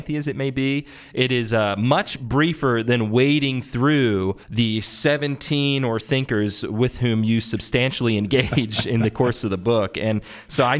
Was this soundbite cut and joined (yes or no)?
yes